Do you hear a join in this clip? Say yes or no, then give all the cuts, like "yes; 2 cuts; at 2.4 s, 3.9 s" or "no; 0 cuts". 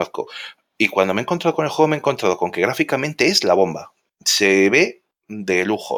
no; 0 cuts